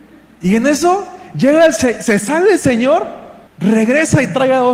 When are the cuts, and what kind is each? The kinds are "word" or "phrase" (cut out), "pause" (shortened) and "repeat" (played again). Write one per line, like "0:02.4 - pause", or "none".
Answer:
0:03.5 - pause